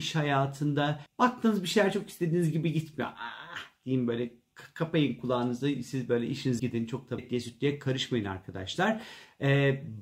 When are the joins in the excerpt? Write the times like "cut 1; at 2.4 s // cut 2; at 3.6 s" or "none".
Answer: cut 1; at 1.1 s // cut 2; at 6.6 s // cut 3; at 7.2 s